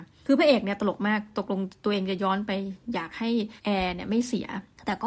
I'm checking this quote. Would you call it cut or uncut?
cut